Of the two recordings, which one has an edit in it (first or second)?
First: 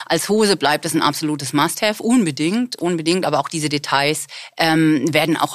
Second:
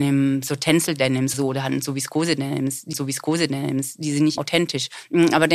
second